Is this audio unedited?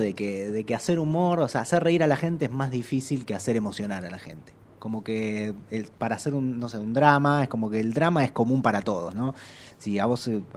yes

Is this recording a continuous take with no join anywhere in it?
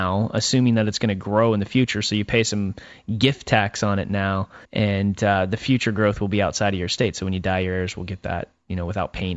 no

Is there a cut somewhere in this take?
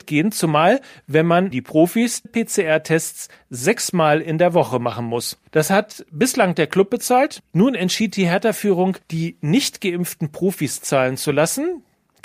yes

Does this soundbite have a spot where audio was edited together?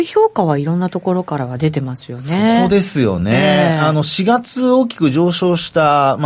no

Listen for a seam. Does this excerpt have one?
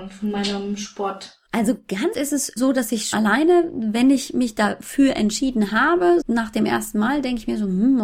yes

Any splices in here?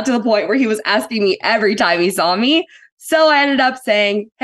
no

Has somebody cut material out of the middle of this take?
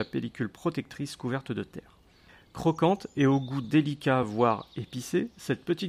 no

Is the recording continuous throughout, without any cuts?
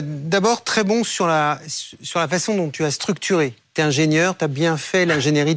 no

